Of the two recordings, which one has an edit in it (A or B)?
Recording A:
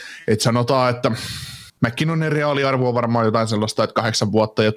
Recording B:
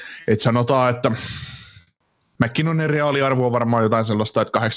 A